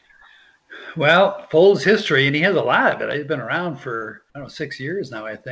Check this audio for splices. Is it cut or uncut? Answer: cut